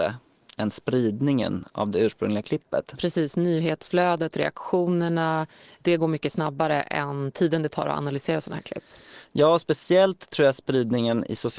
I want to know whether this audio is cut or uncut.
uncut